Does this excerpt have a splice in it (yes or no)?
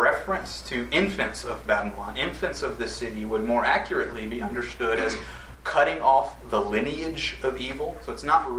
no